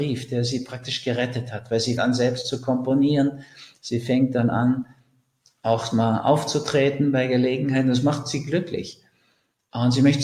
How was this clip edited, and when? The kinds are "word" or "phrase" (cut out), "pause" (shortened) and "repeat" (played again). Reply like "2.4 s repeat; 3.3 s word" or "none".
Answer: 2.0 s word